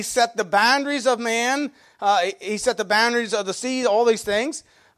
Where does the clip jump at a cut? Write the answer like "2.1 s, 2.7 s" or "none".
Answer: none